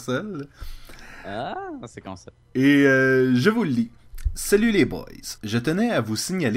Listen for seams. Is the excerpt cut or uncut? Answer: cut